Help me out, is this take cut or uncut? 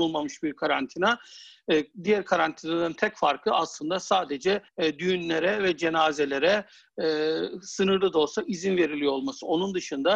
cut